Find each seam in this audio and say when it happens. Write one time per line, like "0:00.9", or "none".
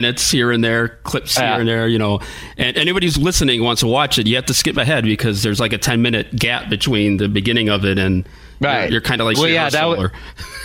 0:09.3

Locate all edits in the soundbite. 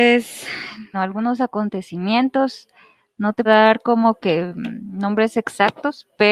0:00.9
0:03.5

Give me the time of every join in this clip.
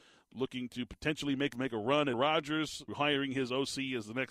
0:01.5
0:02.1
0:02.9

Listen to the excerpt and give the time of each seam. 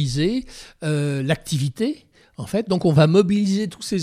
none

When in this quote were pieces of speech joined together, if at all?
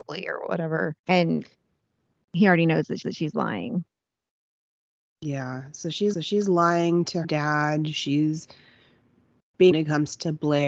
0:01.0
0:03.0
0:06.1
0:07.2
0:09.7

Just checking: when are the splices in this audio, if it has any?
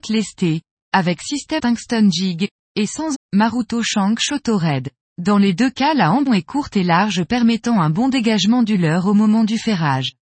0:01.6
0:03.1
0:05.0
0:06.3

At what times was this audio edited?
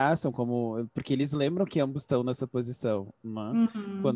none

